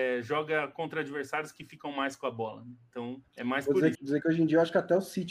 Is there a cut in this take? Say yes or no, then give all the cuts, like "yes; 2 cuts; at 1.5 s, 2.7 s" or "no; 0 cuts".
yes; 2 cuts; at 3.3 s, 3.9 s